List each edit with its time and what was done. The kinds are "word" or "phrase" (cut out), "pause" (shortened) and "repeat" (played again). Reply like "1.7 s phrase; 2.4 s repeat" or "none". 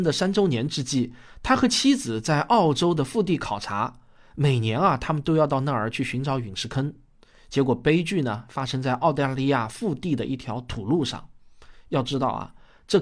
none